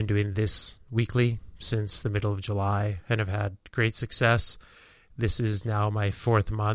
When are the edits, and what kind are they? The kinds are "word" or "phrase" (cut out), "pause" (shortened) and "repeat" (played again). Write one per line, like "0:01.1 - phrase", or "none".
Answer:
none

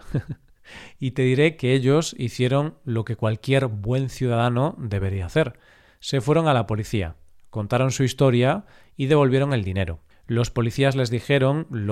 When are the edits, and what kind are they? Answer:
none

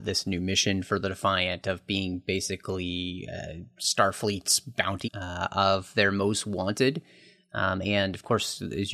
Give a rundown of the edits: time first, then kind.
0:05.0 - word

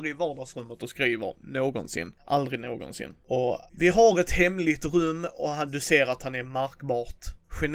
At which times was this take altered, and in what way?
0:02.2 - pause
0:03.7 - pause

